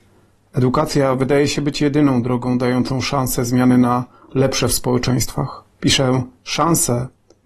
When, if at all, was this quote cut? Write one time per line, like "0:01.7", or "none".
0:05.7